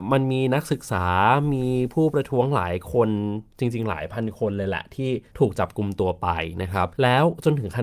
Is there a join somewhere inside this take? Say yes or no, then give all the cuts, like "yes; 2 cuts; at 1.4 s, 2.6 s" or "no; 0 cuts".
yes; 2 cuts; at 5.3 s, 6.9 s